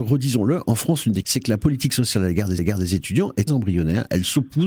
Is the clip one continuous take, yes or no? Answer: no